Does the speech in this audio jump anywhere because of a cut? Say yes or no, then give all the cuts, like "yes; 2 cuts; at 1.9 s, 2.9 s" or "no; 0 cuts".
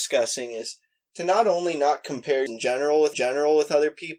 yes; 2 cuts; at 2.5 s, 3.1 s